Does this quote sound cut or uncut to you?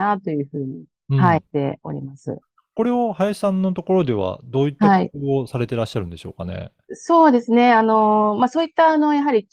uncut